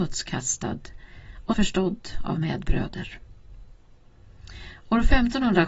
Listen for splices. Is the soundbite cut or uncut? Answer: cut